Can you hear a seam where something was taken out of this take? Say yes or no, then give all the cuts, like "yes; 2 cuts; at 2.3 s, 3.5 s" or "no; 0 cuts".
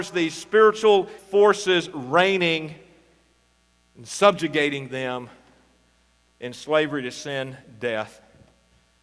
yes; 1 cut; at 1.2 s